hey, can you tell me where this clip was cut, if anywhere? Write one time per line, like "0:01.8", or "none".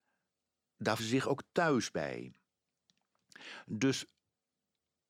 0:01.0